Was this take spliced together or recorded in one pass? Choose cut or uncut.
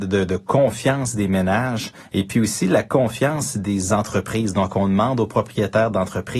uncut